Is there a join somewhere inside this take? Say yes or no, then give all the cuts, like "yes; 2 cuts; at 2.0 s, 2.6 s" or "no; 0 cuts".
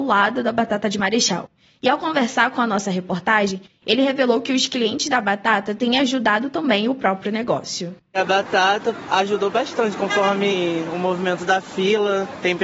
no; 0 cuts